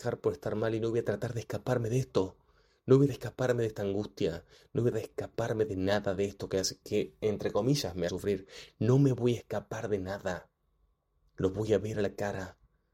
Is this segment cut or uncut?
cut